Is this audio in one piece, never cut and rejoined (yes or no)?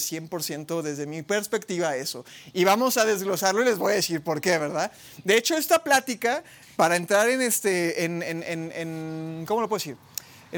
yes